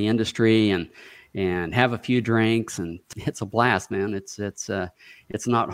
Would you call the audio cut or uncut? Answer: uncut